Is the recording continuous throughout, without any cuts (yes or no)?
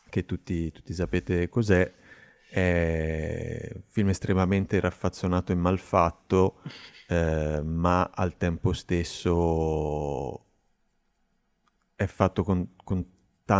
yes